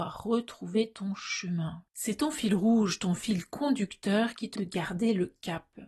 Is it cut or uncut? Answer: cut